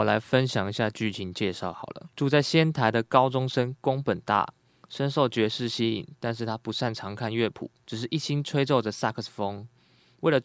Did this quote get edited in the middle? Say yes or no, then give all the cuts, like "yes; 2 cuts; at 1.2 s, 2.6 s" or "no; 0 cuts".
yes; 2 cuts; at 2.1 s, 7.8 s